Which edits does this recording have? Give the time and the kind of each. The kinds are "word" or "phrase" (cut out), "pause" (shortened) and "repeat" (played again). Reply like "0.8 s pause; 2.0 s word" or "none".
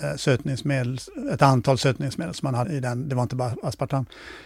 2.6 s word